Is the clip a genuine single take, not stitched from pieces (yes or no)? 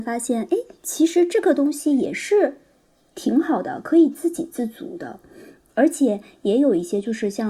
yes